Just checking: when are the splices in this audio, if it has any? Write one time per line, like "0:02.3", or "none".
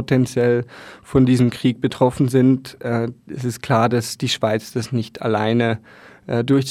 0:03.2